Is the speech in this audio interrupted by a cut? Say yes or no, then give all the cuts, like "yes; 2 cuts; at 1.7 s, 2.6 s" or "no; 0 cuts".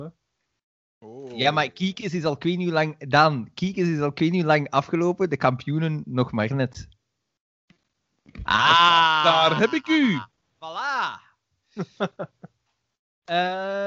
no; 0 cuts